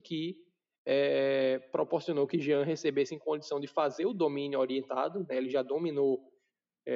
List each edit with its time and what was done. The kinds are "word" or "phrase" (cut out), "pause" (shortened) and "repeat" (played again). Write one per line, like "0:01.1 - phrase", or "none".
none